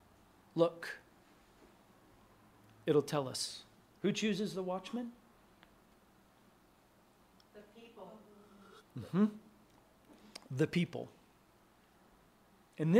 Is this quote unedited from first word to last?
yes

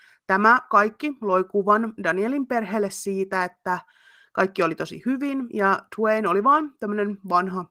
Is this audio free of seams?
yes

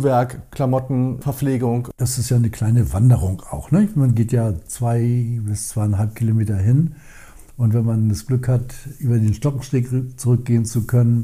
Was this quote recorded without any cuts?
yes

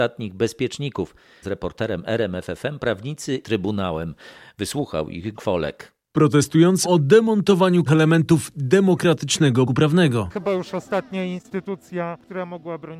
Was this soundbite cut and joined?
yes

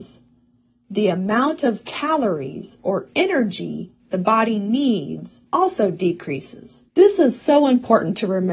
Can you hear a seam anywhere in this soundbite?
yes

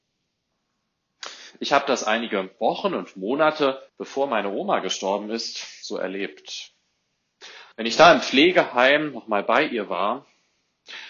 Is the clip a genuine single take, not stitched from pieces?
no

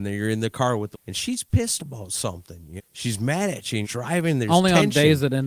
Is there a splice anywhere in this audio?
yes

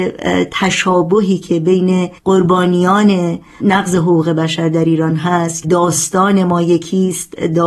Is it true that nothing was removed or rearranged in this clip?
no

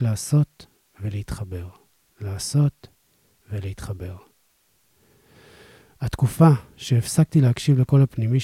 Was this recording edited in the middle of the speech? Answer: no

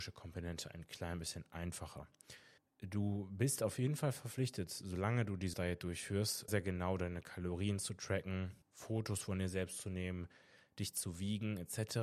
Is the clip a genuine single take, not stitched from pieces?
no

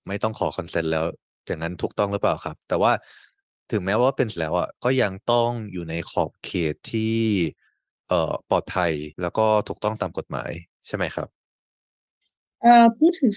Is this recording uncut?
no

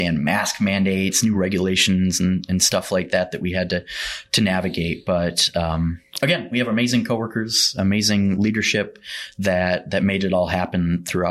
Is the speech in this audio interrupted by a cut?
no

